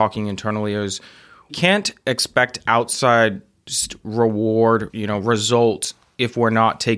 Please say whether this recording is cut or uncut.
cut